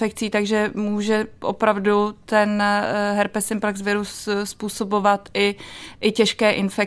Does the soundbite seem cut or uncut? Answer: uncut